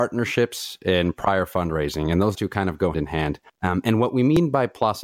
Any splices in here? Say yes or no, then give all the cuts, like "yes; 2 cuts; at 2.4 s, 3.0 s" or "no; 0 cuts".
yes; 3 cuts; at 2.3 s, 2.9 s, 3.5 s